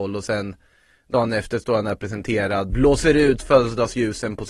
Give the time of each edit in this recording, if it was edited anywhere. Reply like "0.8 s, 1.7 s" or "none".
2.7 s